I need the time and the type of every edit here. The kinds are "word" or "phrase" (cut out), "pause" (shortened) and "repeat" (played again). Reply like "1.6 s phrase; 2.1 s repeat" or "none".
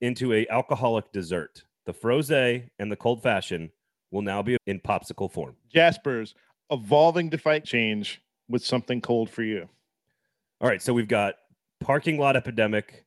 1.7 s pause; 4.6 s word; 5.6 s pause; 7.6 s word